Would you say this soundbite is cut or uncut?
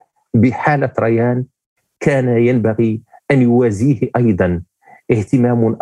uncut